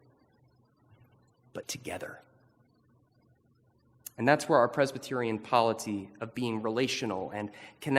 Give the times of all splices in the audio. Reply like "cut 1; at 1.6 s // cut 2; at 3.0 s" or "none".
cut 1; at 1.6 s